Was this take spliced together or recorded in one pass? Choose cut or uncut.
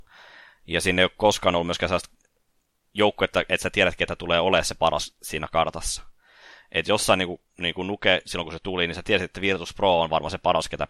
uncut